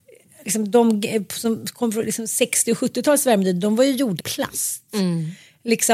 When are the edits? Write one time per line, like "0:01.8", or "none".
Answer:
0:04.2

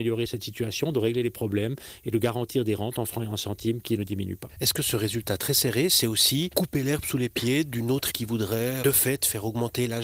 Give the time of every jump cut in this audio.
0:08.1

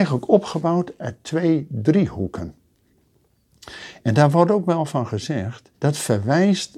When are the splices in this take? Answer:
0:05.7

